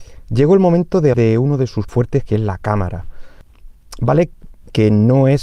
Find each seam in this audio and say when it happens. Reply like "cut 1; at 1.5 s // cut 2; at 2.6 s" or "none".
cut 1; at 1.1 s // cut 2; at 1.9 s